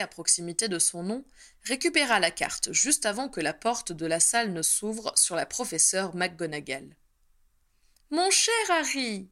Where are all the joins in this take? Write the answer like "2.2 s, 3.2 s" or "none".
none